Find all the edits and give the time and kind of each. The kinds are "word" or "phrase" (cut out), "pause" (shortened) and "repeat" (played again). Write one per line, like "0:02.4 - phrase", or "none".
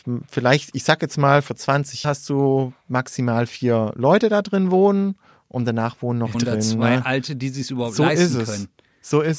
0:02.0 - word
0:06.3 - word
0:07.3 - word